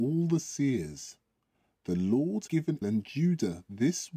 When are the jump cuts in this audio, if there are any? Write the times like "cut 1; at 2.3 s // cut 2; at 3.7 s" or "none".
cut 1; at 2.5 s // cut 2; at 2.8 s